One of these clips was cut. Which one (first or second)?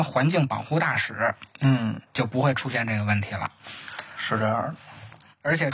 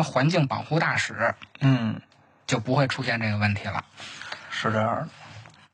first